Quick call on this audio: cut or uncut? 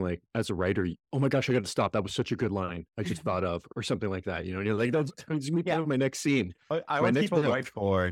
cut